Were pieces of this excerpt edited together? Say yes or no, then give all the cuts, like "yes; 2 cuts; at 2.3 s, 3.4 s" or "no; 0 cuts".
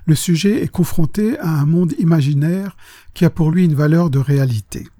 no; 0 cuts